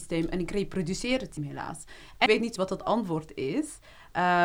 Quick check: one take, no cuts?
no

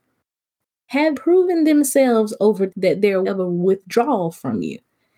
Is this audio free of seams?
no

